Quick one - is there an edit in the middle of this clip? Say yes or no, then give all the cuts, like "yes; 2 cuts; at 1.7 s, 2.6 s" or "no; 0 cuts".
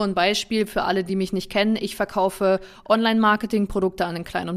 no; 0 cuts